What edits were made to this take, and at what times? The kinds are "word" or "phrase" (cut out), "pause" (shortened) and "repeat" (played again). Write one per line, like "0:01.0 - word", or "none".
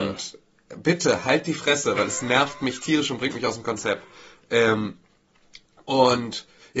none